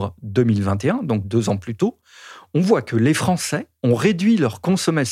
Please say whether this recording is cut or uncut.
uncut